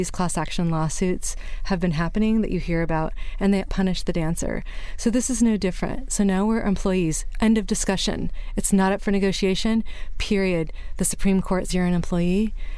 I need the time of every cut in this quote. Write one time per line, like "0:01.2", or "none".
0:03.7
0:11.7